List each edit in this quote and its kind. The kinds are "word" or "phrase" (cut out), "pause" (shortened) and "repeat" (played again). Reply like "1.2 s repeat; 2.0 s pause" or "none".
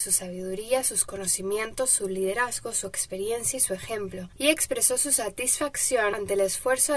none